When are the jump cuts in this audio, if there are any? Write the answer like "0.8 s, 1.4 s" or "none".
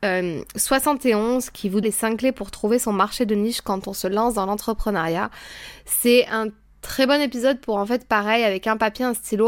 1.8 s